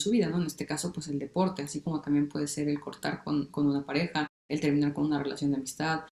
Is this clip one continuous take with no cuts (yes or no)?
no